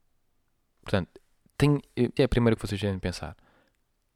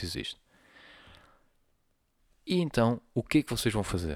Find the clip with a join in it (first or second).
first